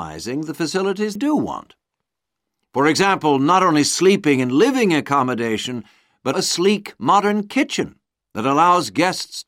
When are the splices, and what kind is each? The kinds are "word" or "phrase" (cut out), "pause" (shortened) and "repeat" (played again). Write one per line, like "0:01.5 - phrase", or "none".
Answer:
0:01.2 - word
0:06.3 - word